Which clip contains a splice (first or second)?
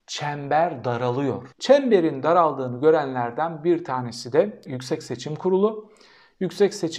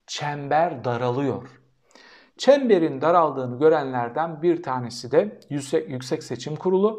first